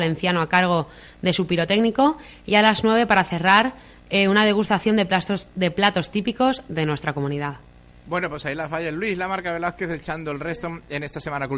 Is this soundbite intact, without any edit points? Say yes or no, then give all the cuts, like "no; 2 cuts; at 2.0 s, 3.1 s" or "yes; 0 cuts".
yes; 0 cuts